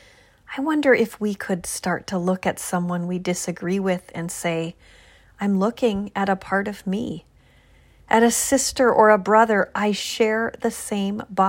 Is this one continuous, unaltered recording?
yes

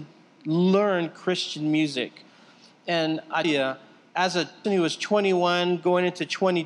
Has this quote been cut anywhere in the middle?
yes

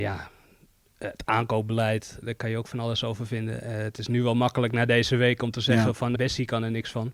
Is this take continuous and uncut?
no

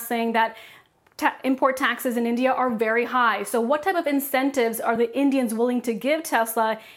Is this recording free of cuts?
yes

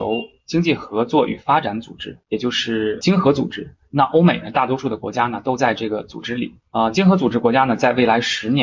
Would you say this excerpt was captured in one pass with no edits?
no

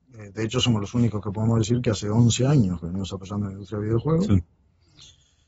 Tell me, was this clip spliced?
no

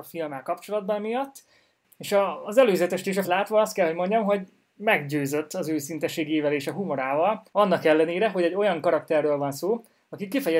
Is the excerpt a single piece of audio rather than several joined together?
no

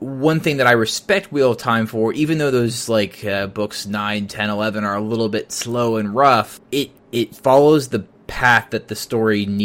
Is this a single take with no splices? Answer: yes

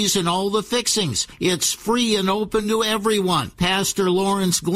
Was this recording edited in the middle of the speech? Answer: no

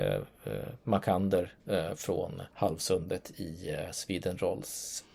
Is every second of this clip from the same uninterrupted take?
no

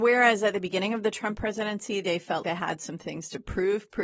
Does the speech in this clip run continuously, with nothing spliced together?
no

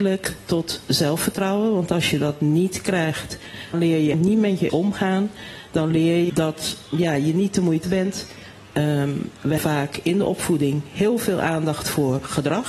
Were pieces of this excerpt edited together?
yes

